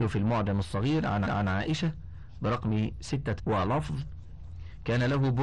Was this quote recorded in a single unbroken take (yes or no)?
no